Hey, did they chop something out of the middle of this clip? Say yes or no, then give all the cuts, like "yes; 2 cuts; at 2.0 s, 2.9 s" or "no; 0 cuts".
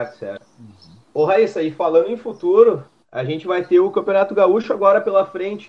no; 0 cuts